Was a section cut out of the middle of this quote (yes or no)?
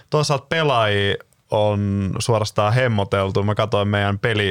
no